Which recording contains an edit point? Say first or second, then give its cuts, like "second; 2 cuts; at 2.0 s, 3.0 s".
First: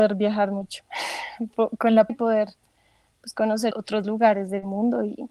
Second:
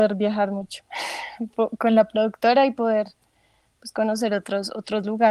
first; 2 cuts; at 2.1 s, 3.7 s